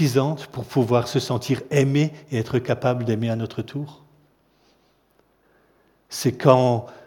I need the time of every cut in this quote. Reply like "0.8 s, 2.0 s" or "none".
none

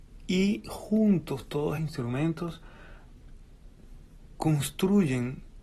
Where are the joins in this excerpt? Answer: 1.8 s

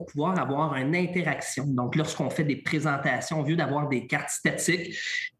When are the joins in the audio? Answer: none

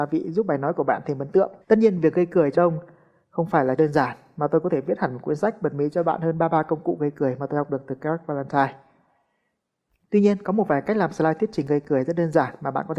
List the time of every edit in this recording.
1.6 s, 2.5 s, 3.8 s

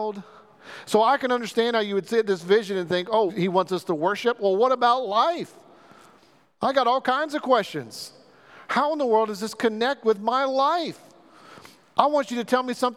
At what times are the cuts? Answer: 3.3 s

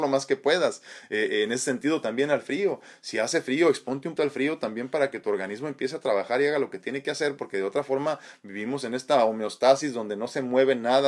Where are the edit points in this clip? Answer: 4.2 s

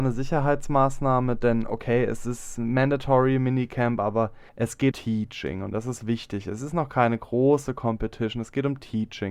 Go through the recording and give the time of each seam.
4.5 s, 4.9 s

